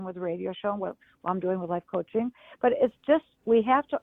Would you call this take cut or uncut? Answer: uncut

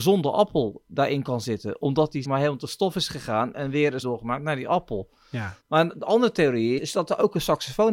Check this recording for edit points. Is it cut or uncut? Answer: cut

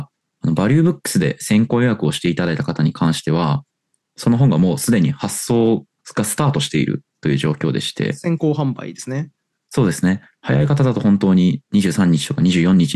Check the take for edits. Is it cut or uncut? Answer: uncut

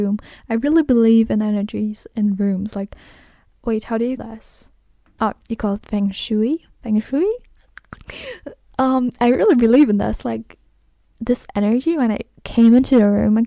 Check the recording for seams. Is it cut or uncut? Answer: cut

